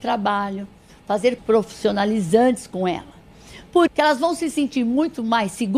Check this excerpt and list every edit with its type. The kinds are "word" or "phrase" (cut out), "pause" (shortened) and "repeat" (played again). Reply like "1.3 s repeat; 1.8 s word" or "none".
1.4 s word; 3.9 s word